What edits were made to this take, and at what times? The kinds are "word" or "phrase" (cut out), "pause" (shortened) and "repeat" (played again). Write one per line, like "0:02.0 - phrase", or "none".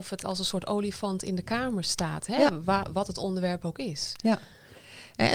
none